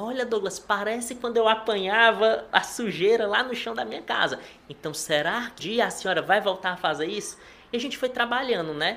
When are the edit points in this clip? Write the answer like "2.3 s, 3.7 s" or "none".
5.6 s